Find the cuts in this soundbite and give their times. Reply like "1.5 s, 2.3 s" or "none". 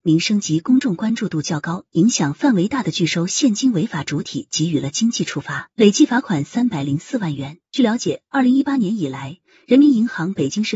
5.7 s, 7.6 s